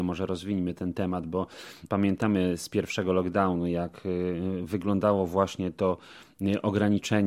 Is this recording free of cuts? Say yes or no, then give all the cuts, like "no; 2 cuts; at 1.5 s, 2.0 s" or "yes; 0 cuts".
yes; 0 cuts